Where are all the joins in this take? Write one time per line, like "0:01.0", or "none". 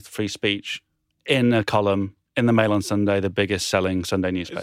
none